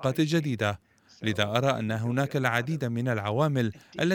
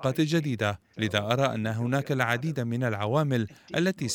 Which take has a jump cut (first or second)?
second